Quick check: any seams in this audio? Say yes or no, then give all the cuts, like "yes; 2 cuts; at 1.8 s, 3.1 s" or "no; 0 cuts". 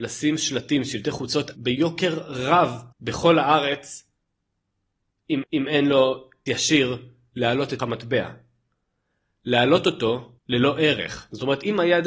yes; 6 cuts; at 1.5 s, 2.9 s, 5.4 s, 6.5 s, 7.8 s, 10.4 s